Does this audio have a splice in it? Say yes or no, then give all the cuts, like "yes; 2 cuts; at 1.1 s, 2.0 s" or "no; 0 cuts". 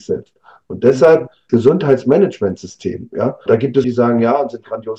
yes; 3 cuts; at 1.5 s, 3.5 s, 3.8 s